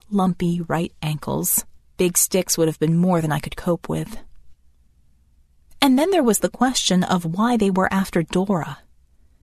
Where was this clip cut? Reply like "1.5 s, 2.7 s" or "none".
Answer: 1.8 s